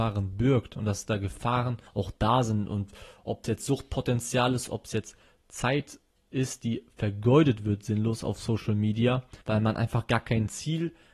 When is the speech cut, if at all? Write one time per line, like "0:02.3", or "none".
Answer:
0:01.9
0:09.4